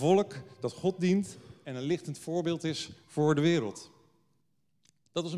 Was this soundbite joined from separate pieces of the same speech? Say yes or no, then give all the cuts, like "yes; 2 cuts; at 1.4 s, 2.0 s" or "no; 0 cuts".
no; 0 cuts